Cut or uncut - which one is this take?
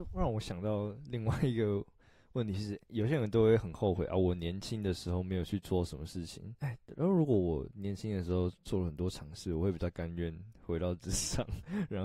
cut